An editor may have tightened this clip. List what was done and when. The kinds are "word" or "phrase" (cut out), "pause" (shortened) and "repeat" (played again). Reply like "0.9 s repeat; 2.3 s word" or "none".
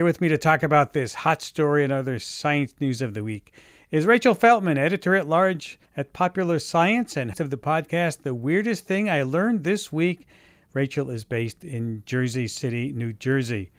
5.9 s pause; 7.3 s word